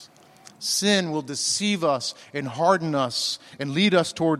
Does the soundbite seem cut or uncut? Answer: uncut